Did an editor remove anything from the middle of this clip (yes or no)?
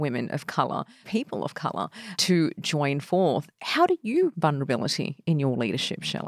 yes